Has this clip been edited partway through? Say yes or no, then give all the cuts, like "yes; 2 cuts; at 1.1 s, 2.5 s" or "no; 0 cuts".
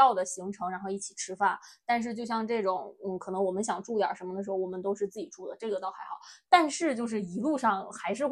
no; 0 cuts